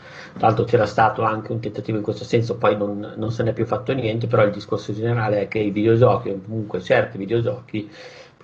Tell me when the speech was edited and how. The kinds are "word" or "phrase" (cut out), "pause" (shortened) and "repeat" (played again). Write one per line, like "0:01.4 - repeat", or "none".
none